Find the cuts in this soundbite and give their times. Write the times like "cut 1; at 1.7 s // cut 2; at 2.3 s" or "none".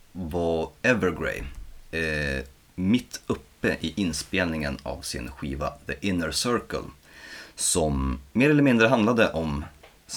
cut 1; at 8.3 s